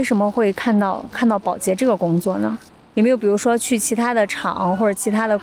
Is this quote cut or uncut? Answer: cut